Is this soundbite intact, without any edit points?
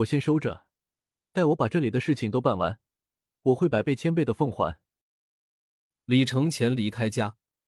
yes; 0 cuts

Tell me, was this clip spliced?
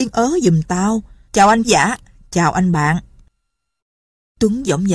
yes; 2 cuts; at 1.3 s, 1.6 s

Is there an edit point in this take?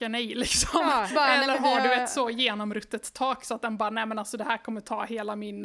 yes; 1 cut; at 1.1 s

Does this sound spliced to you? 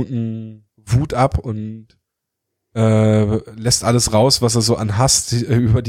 no; 0 cuts

